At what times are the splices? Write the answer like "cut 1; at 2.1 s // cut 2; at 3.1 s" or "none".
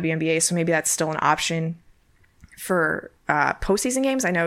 cut 1; at 3.2 s